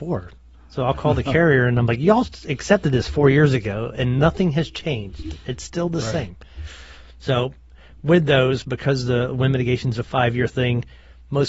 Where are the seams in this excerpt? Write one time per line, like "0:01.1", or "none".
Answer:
none